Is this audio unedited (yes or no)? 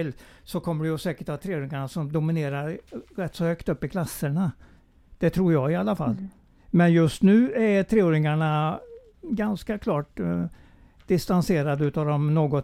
yes